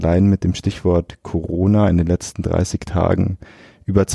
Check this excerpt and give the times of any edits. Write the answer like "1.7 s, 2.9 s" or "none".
none